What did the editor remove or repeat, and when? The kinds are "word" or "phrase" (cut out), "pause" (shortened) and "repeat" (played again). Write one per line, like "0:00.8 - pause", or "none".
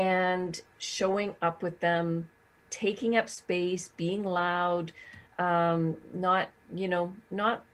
none